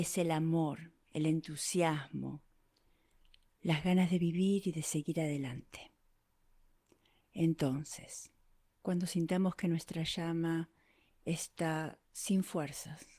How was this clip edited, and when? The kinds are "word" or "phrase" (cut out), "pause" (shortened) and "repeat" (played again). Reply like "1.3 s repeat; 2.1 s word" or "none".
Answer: none